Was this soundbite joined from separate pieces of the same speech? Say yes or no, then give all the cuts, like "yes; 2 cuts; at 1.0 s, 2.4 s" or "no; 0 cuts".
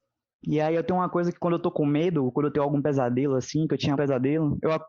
yes; 1 cut; at 3.9 s